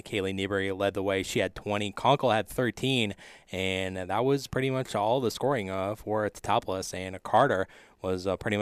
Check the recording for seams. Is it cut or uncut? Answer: uncut